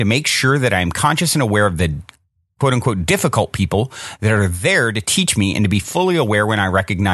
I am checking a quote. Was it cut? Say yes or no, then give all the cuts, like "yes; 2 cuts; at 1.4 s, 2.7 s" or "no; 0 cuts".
no; 0 cuts